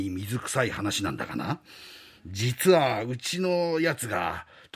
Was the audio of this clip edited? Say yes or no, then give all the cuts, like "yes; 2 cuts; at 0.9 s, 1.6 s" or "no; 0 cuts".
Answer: no; 0 cuts